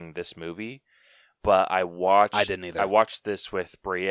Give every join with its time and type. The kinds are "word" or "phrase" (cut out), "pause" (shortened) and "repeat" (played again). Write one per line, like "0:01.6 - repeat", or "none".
none